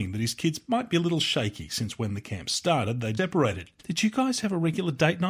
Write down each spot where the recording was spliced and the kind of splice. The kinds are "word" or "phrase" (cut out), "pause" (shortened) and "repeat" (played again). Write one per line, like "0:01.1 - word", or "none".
0:03.2 - word
0:03.8 - pause